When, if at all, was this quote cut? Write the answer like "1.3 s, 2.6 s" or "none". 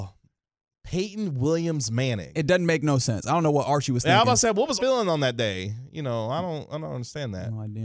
4.8 s